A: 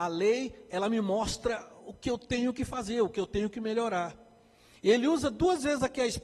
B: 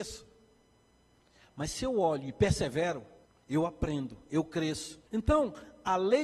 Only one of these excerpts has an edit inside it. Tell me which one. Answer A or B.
B